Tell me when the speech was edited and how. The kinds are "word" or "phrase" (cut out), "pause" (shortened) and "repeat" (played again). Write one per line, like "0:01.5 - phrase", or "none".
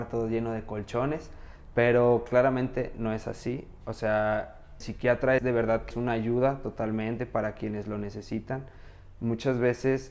0:04.8 - word
0:05.4 - word
0:05.9 - word

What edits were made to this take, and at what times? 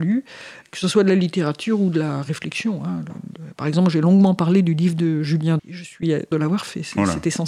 0:05.6 - word
0:06.3 - phrase

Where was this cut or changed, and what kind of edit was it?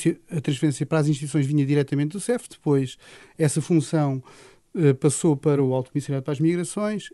none

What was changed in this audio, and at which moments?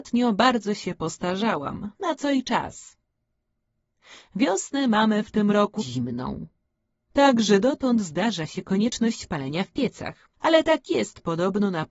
0:05.8 - word
0:10.3 - pause

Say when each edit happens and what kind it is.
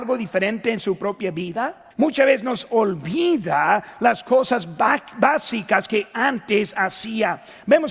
0:01.9 - pause

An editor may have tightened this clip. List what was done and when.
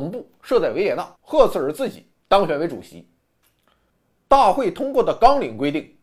0:01.1 - pause

